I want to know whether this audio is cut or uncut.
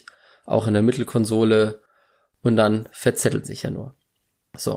cut